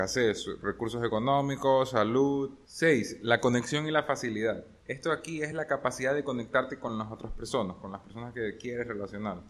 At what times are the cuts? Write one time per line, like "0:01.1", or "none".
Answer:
none